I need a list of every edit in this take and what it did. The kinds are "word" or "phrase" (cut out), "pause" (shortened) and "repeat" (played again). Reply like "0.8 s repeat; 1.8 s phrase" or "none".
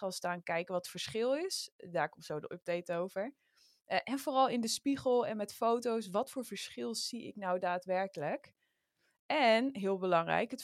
none

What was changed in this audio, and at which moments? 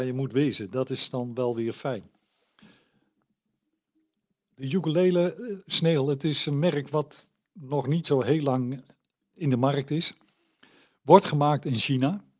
none

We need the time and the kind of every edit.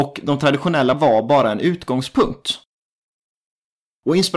0.9 s word

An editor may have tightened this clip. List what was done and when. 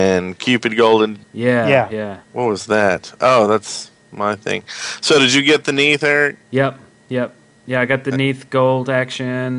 1.2 s pause; 2.2 s pause; 6.4 s pause

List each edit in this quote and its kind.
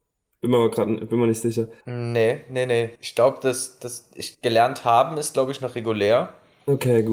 1.8 s pause; 3.0 s pause; 4.3 s pause

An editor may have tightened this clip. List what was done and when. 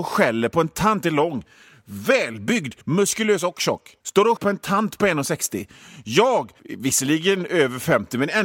1.0 s phrase; 2.8 s pause; 4.0 s pause; 4.4 s word; 6.6 s pause

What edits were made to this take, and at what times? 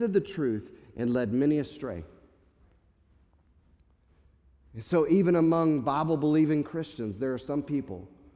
none

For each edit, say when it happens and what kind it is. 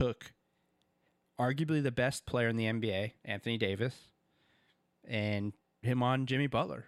2.3 s word; 3.2 s pause; 5.8 s word

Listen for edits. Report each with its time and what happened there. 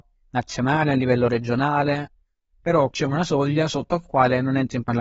2.9 s word

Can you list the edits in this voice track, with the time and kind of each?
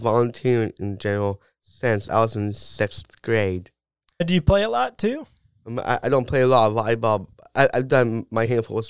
none

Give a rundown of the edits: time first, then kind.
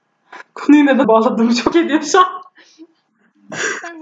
1.0 s word; 1.7 s word

